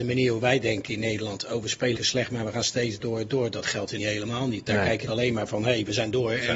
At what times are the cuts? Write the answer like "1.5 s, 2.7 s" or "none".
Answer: 2.0 s, 3.0 s, 4.0 s, 5.1 s